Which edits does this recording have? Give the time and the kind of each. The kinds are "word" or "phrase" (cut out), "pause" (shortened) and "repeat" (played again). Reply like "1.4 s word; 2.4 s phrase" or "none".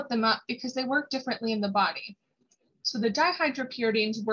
none